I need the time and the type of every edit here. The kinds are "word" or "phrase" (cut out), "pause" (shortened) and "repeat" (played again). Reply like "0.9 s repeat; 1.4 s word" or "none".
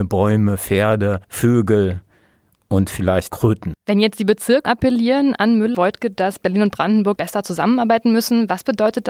1.2 s pause; 3.3 s word; 4.7 s word; 5.7 s phrase; 7.2 s word